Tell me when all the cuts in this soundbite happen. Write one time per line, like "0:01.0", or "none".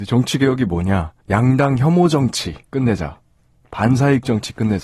0:01.2
0:02.7